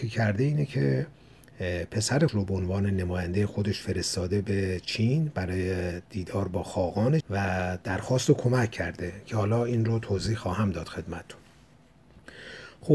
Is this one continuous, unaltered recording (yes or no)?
no